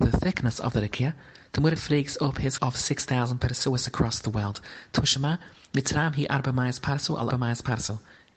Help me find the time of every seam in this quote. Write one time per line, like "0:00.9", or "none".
0:01.8
0:02.6
0:07.3